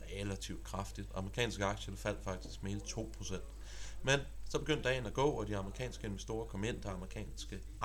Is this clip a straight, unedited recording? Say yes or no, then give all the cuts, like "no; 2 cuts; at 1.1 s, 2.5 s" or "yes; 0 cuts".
yes; 0 cuts